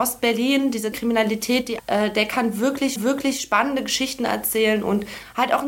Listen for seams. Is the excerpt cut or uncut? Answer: cut